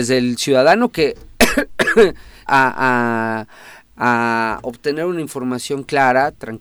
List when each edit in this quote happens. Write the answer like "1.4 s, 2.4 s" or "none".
2.5 s

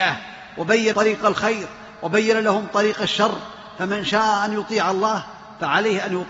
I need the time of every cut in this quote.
0.9 s

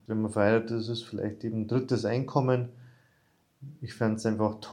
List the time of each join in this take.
3.8 s

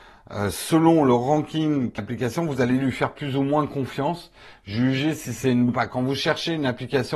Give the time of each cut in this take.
2.0 s, 5.7 s

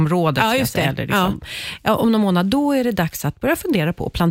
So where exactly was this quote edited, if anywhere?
none

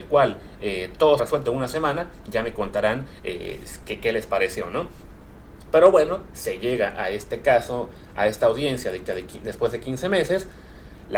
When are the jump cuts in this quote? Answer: 1.2 s, 9.1 s

